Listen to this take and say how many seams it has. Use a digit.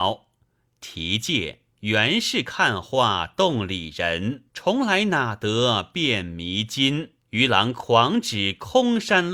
3